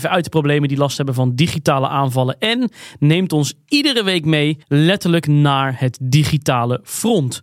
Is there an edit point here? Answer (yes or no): yes